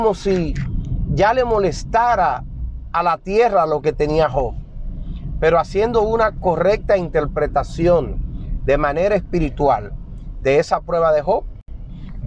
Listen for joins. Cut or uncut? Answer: uncut